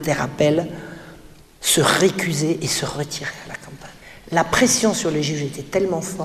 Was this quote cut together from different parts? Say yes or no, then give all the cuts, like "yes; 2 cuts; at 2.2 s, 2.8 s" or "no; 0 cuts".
yes; 2 cuts; at 1.4 s, 4.0 s